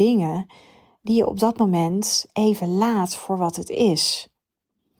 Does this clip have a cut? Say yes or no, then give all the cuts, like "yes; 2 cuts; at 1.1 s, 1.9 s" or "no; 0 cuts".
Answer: no; 0 cuts